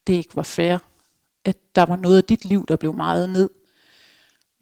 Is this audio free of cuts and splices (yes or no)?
yes